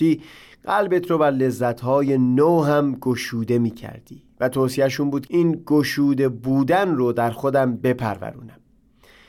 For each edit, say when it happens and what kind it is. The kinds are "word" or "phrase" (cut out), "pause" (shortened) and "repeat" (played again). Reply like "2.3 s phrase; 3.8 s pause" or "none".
5.3 s word